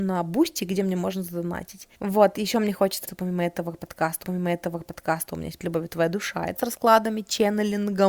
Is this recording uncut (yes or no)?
no